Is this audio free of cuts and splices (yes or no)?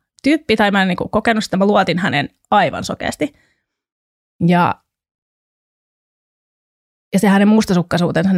yes